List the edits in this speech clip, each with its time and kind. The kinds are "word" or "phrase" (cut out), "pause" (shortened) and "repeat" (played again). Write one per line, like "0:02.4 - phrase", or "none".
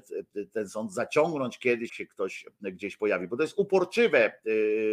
0:01.9 - word